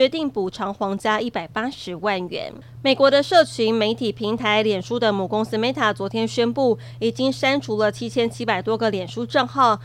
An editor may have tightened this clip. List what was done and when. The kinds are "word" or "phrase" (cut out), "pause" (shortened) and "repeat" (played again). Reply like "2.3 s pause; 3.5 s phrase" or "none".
none